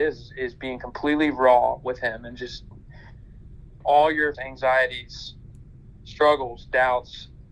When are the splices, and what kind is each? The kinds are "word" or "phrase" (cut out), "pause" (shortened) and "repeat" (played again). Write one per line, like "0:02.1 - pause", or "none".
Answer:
0:03.8 - word
0:04.3 - word

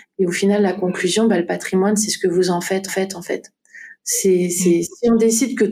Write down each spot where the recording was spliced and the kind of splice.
0:02.9 - repeat

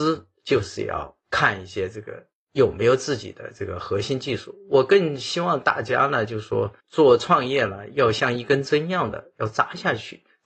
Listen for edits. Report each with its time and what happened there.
0:01.2 - pause
0:06.8 - pause

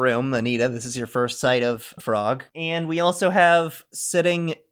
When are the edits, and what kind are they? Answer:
0:02.0 - word
0:02.5 - pause

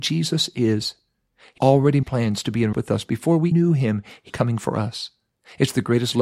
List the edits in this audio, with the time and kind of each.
0:01.6 - word
0:02.0 - word
0:02.7 - word
0:03.5 - word
0:04.3 - word

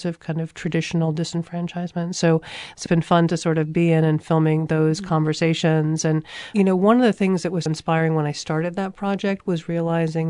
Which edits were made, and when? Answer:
0:02.9 - word
0:07.7 - word

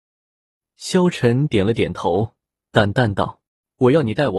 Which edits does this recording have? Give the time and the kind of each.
0:03.5 - pause

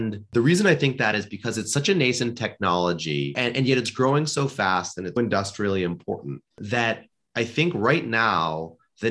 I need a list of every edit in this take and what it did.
0:05.2 - word

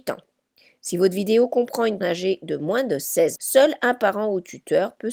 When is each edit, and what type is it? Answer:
0:02.0 - word
0:03.4 - word

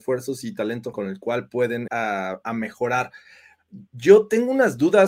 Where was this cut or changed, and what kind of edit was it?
0:00.9 - word
0:01.9 - word
0:03.9 - pause

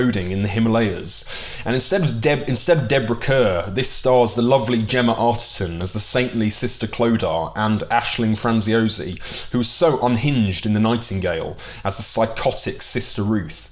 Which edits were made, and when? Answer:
none

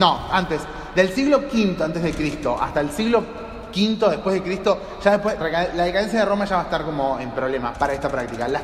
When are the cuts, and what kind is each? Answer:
0:05.4 - word
0:07.7 - word

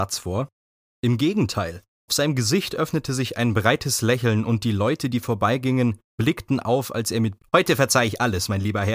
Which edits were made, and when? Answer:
0:02.1 - word
0:07.4 - phrase

